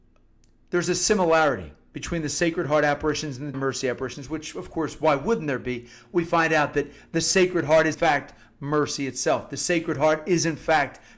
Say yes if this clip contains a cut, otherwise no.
yes